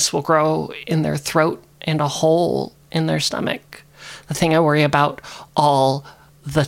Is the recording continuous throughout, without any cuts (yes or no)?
no